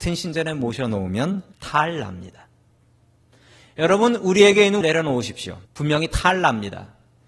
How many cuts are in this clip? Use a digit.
3